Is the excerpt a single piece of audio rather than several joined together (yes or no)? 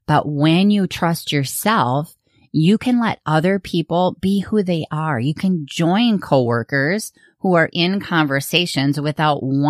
yes